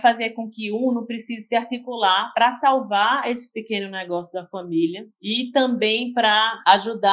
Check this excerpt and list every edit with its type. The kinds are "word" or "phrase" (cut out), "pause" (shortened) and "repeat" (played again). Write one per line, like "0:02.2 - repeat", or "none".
none